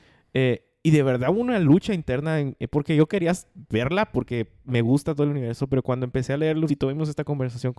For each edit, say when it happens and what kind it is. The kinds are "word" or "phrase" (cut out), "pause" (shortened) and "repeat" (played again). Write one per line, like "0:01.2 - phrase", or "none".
0:06.7 - word